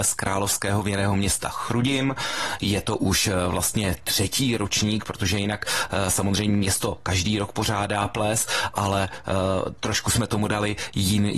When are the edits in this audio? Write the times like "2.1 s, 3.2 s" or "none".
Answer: none